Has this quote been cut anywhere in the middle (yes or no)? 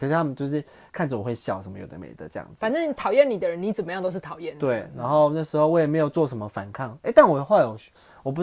no